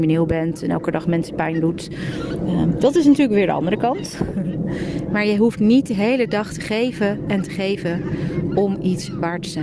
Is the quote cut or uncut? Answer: uncut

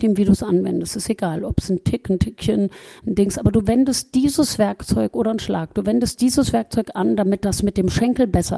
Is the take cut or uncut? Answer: uncut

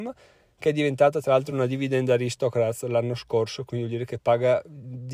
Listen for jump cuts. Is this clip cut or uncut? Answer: uncut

